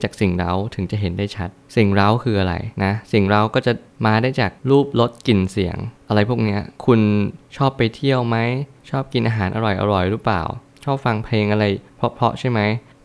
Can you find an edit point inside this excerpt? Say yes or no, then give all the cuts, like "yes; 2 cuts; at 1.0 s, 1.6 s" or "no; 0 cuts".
yes; 2 cuts; at 2.7 s, 6.8 s